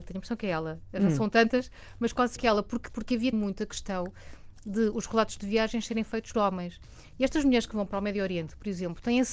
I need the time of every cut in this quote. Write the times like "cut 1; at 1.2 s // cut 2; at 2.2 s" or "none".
cut 1; at 2.4 s // cut 2; at 2.9 s // cut 3; at 3.3 s // cut 4; at 6.3 s